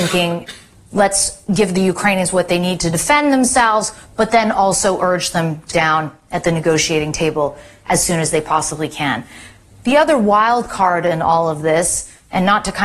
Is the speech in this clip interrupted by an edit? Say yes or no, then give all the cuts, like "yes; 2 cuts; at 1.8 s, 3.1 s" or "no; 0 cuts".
yes; 1 cut; at 5.7 s